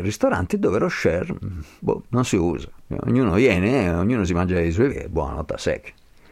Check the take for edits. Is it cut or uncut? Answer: cut